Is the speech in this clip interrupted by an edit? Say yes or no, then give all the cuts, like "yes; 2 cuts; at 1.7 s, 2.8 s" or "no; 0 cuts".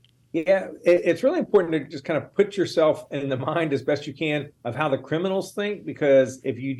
no; 0 cuts